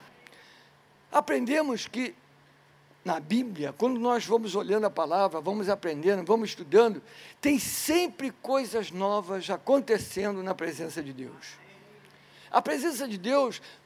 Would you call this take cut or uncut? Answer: uncut